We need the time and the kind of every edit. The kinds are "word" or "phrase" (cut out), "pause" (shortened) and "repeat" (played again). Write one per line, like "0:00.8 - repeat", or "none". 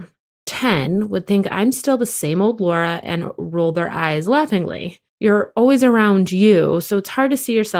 0:05.1 - pause